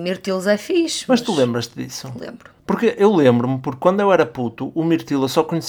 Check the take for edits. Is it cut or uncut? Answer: cut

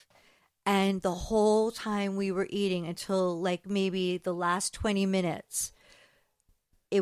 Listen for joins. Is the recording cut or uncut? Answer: uncut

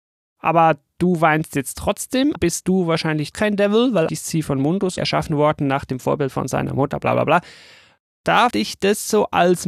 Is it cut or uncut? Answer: cut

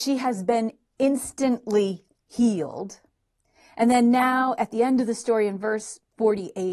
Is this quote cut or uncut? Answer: uncut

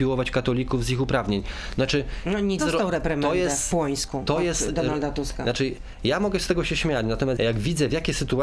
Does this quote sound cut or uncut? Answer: cut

